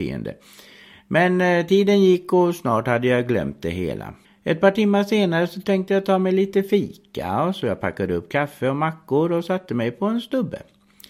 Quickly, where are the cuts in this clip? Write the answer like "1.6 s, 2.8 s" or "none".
4.2 s